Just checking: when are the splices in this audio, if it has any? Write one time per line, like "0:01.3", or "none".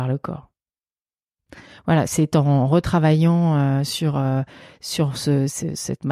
none